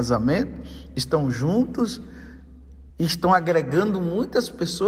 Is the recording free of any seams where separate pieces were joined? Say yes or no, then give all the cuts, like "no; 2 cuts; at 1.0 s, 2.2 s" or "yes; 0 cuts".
no; 1 cut; at 2.9 s